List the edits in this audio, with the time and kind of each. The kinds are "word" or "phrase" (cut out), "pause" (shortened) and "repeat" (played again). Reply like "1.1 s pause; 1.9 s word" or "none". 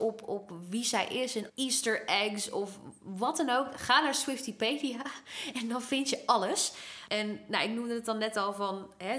1.5 s word